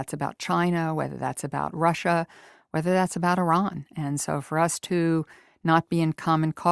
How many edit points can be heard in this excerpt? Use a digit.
0